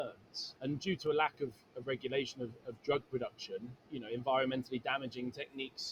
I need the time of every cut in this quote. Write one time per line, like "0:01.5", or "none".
none